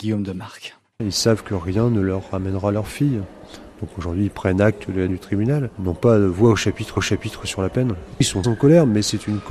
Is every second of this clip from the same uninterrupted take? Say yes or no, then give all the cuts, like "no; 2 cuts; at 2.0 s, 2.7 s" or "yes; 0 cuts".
no; 3 cuts; at 5.1 s, 7.0 s, 8.4 s